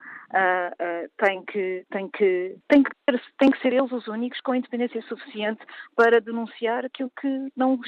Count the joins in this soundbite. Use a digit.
1